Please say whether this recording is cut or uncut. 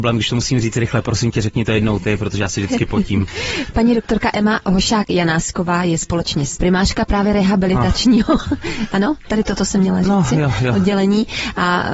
cut